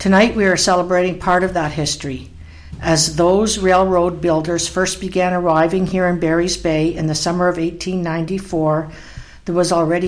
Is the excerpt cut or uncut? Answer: uncut